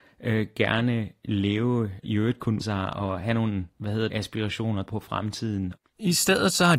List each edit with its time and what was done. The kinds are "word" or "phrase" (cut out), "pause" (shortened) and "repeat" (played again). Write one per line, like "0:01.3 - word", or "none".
0:02.0 - phrase
0:02.6 - word
0:03.7 - pause
0:04.1 - word
0:04.9 - word